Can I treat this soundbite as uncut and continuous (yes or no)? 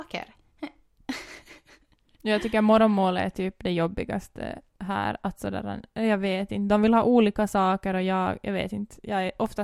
yes